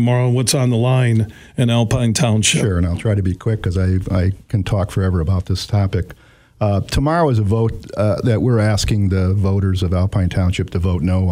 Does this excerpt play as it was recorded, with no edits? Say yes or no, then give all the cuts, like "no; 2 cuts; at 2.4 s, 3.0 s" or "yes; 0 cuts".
yes; 0 cuts